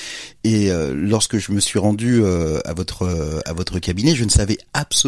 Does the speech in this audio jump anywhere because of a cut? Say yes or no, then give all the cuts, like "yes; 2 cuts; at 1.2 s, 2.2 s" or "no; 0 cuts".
no; 0 cuts